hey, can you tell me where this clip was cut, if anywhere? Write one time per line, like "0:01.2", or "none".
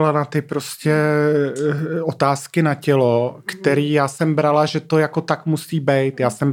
none